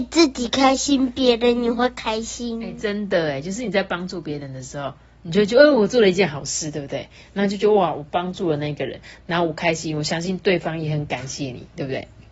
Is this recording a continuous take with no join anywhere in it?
yes; 0 cuts

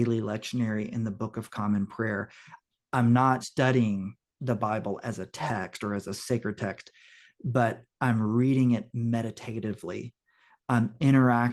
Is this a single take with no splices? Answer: no; 1 cut; at 3.4 s

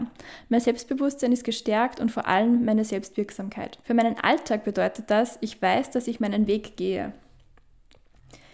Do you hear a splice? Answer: yes; 1 cut; at 3.8 s

